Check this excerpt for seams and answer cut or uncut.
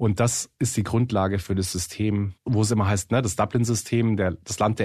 cut